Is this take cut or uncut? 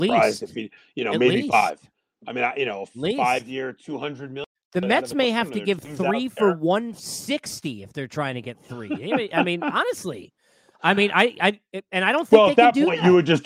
uncut